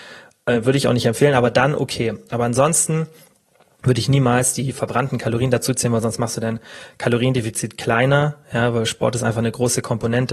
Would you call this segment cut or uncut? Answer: uncut